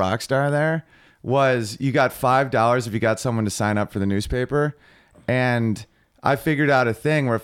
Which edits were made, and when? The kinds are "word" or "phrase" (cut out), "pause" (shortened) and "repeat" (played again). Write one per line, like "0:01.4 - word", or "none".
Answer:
none